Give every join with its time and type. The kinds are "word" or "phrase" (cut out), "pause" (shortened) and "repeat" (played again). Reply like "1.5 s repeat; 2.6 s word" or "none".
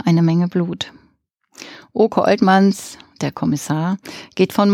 none